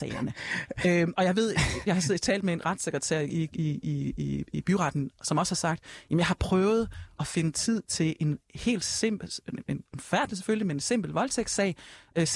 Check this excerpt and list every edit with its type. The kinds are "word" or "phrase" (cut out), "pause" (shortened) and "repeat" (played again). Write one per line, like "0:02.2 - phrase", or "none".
0:09.9 - word